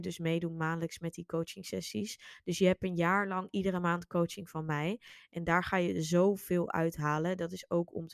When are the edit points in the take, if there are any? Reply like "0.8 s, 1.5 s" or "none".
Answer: none